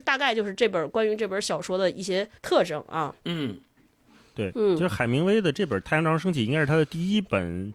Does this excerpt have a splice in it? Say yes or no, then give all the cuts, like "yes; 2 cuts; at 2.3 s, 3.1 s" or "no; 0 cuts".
yes; 2 cuts; at 2.4 s, 3.2 s